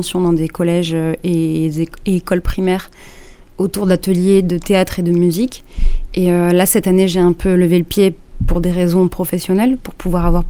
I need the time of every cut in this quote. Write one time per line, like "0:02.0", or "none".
none

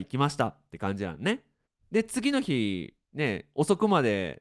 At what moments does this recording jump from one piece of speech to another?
0:01.6
0:03.0

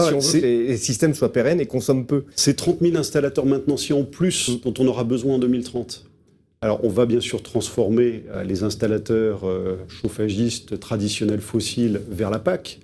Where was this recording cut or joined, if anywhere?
0:02.3

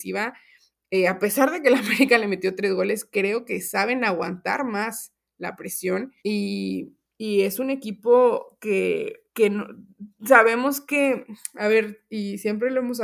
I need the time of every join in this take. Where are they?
0:06.2
0:09.3

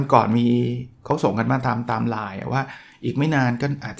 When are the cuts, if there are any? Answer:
none

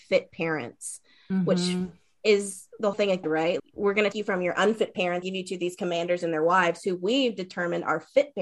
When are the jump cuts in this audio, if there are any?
0:02.9
0:03.2
0:03.6
0:04.1
0:05.2

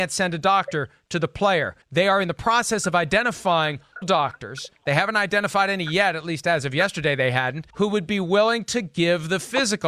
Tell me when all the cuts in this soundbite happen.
0:01.8
0:04.0
0:07.7

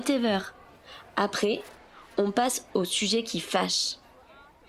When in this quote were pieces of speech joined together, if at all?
none

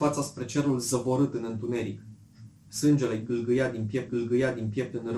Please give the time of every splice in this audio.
0:04.1

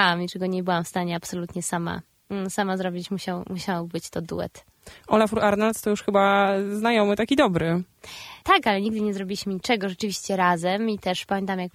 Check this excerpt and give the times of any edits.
none

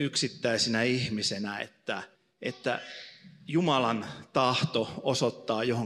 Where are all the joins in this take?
0:02.1

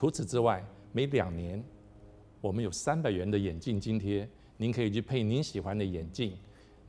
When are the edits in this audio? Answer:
none

